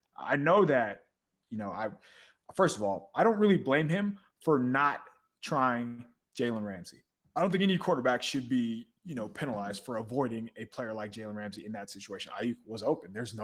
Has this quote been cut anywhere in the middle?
yes; 1 cut; at 7.1 s

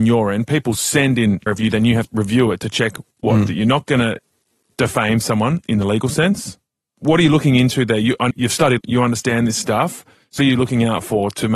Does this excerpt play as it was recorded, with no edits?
no; 6 cuts; at 1.5 s, 2.1 s, 5.6 s, 8.3 s, 8.8 s, 10.4 s

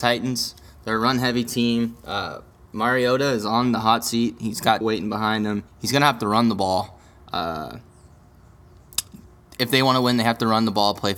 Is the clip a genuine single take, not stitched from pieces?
no; 2 cuts; at 4.8 s, 5.7 s

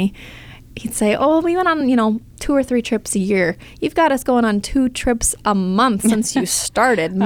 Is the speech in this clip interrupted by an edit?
no; 0 cuts

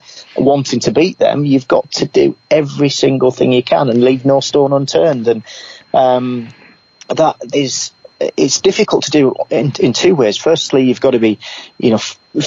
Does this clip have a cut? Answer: yes; 1 cut; at 7.5 s

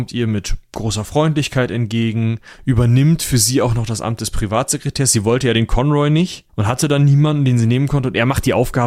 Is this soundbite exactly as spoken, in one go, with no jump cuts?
no; 1 cut; at 6.5 s

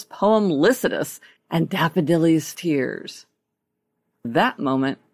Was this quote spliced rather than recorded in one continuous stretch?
yes; 3 cuts; at 1.4 s, 2.5 s, 4.2 s

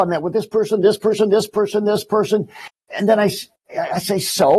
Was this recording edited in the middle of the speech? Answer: no; 0 cuts

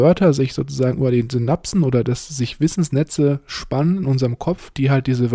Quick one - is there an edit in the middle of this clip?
no; 0 cuts

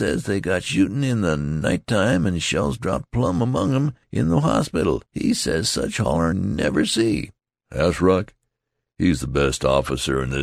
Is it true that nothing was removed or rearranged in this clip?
no; 4 cuts; at 4.0 s, 5.1 s, 6.3 s, 7.4 s

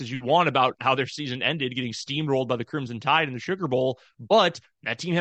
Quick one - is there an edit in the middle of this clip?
no; 0 cuts

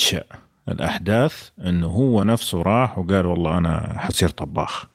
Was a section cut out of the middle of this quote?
no; 0 cuts

